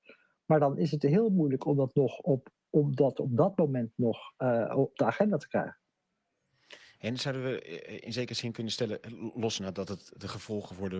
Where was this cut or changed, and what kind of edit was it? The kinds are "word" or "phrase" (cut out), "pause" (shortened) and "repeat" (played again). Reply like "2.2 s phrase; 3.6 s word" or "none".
4.9 s word